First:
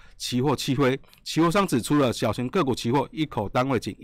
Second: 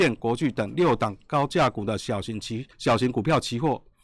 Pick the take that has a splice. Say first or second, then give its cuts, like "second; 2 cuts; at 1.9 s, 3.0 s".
second; 1 cut; at 2.7 s